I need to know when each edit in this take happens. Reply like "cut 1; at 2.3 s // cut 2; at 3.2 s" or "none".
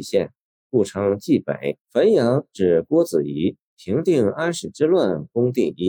cut 1; at 1.8 s